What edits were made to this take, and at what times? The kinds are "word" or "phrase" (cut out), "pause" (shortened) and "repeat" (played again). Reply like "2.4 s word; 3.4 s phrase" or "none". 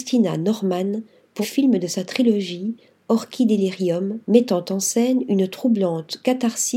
1.4 s word; 4.2 s pause